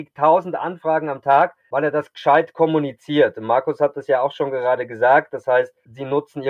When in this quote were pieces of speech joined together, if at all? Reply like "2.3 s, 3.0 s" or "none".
none